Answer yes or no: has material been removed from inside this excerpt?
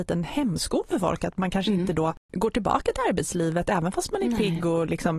no